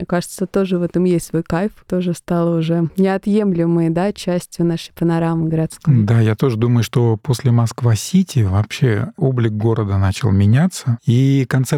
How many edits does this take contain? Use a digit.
0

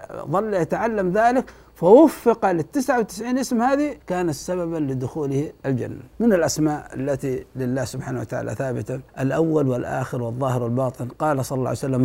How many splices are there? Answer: 3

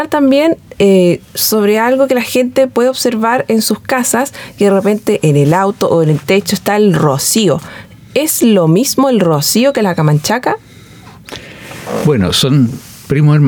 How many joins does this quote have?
0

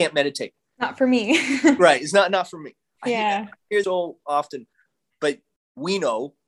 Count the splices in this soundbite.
1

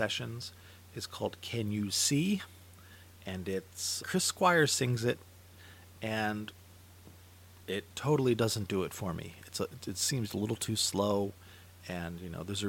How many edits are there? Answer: 2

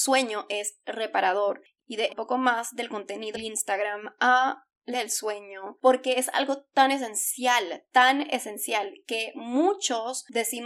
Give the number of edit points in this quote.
3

